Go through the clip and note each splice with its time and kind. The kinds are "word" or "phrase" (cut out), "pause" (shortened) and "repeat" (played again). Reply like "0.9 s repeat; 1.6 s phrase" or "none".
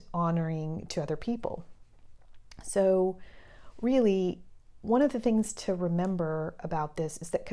none

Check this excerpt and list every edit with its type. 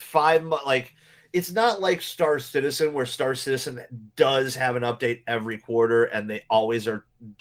none

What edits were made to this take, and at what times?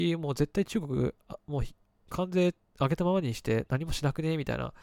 none

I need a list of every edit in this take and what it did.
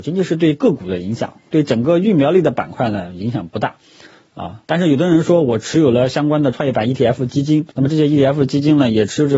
4.6 s pause; 7.7 s pause

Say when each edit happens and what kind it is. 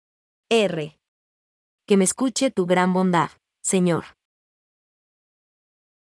none

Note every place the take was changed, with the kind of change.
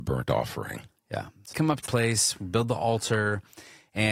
1.5 s word; 1.9 s word

